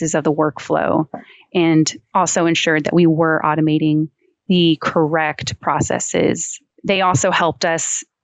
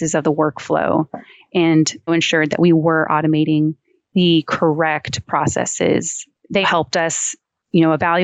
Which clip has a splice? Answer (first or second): second